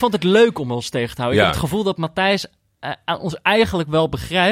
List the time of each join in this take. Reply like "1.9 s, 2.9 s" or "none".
none